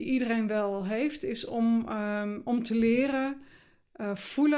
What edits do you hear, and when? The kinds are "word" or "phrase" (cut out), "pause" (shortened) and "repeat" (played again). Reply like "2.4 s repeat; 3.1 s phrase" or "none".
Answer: none